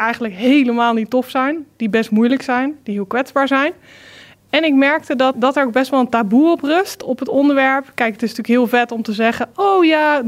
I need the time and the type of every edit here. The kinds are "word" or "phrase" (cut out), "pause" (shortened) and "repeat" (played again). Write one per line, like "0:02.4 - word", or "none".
0:05.3 - word